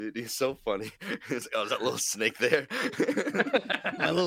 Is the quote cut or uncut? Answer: uncut